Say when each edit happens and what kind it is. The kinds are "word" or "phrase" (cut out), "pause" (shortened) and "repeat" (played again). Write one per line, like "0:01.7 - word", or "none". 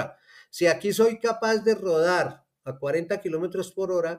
none